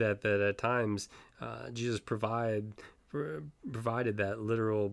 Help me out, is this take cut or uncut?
uncut